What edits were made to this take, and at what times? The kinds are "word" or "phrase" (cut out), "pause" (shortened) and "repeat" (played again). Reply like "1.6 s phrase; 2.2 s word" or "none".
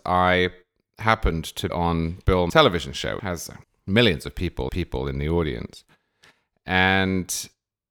1.7 s word; 2.5 s word; 3.2 s word; 3.6 s pause; 4.7 s repeat